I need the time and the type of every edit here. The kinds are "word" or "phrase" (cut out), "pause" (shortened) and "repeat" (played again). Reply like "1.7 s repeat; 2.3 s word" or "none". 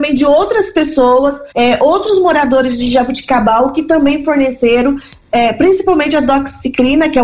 1.5 s pause